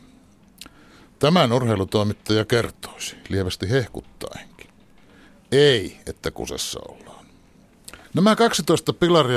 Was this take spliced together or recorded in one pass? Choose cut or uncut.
cut